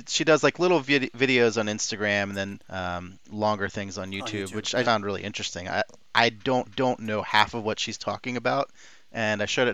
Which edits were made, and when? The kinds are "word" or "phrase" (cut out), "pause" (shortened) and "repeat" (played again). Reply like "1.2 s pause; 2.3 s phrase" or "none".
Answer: 2.6 s pause; 4.8 s word; 6.6 s repeat